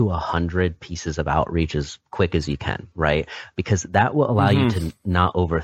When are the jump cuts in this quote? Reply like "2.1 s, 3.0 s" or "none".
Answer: 2.0 s